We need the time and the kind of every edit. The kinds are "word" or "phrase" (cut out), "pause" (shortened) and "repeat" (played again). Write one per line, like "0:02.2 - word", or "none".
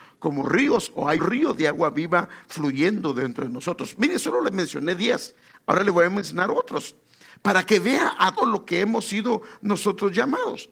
0:01.2 - word
0:08.4 - word